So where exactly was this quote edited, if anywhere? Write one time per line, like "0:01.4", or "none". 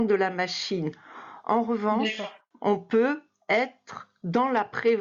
none